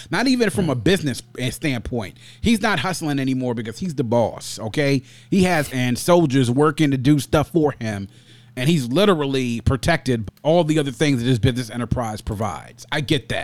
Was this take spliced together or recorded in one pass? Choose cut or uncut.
cut